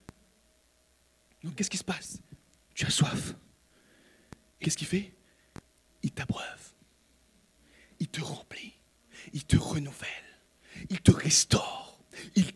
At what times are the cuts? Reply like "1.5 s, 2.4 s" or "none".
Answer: 1.6 s, 4.6 s